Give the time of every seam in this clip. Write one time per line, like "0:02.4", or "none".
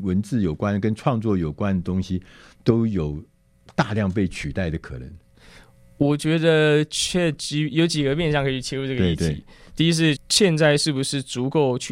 0:10.2